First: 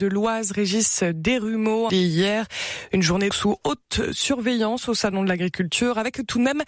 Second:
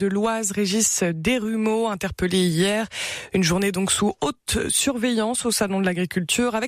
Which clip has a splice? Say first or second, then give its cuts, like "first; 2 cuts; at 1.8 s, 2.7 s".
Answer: first; 2 cuts; at 1.9 s, 3.3 s